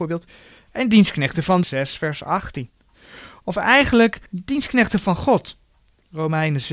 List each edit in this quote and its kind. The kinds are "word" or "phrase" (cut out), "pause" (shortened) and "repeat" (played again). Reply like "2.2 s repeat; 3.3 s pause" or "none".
1.6 s phrase; 4.3 s pause